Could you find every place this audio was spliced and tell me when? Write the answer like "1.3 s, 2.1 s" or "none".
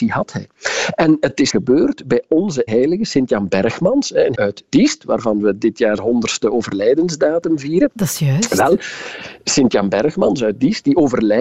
1.5 s, 2.7 s, 4.3 s, 6.0 s